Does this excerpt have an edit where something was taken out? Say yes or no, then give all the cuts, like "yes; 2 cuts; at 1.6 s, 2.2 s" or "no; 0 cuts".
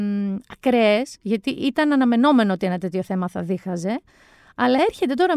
no; 0 cuts